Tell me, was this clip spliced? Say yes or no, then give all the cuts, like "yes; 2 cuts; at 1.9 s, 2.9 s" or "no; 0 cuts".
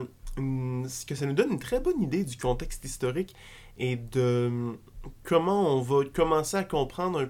no; 0 cuts